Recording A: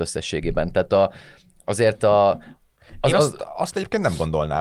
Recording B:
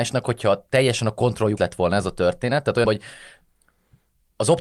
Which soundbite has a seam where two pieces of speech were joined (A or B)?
B